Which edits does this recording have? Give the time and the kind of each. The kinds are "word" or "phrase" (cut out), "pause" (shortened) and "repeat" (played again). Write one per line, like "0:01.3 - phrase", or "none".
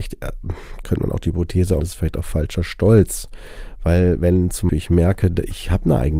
0:01.8 - word
0:04.7 - word